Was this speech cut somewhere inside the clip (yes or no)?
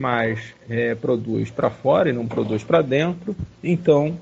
no